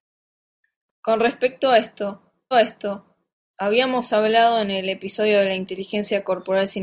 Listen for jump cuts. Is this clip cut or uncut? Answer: cut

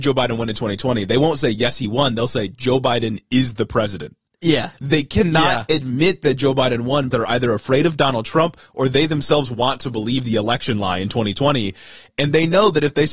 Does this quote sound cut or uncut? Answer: cut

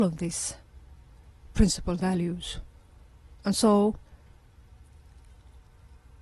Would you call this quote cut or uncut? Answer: cut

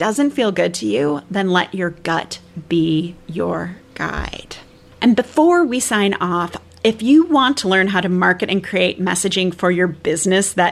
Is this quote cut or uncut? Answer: uncut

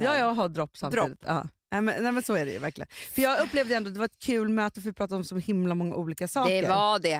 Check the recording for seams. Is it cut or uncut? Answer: uncut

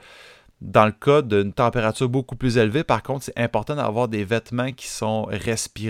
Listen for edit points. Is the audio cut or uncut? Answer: uncut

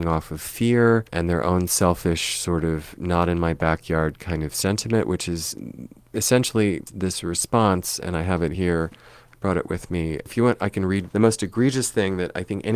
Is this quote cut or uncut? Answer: uncut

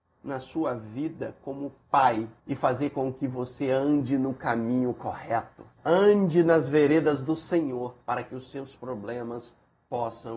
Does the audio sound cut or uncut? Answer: cut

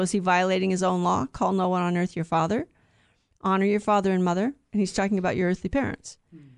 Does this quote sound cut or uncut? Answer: uncut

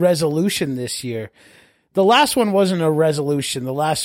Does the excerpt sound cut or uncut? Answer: uncut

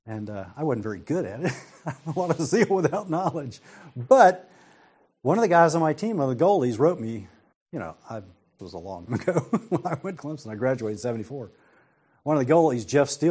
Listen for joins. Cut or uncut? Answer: cut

